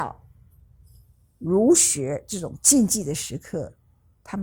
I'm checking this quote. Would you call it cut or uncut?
uncut